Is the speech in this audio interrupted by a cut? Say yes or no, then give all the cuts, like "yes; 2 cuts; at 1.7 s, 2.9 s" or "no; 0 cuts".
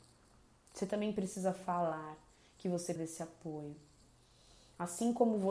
yes; 1 cut; at 3.0 s